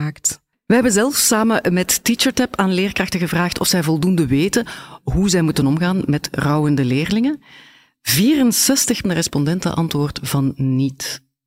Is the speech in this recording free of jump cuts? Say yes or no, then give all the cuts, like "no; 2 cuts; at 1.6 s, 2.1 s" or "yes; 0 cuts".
no; 1 cut; at 9.0 s